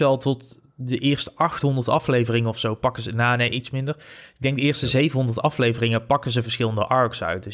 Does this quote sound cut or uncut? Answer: uncut